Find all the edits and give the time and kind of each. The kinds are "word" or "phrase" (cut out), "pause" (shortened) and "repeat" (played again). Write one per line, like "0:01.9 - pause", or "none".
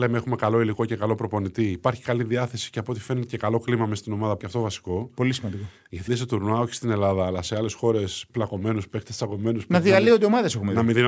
0:04.4 - word
0:06.1 - word
0:08.3 - word